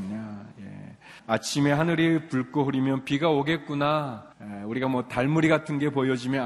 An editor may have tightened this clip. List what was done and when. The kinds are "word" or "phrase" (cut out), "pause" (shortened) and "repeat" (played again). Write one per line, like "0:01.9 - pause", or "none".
0:01.2 - pause
0:04.3 - pause